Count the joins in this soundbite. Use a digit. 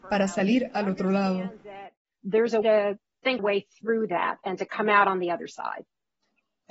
2